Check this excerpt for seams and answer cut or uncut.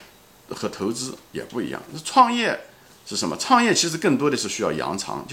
uncut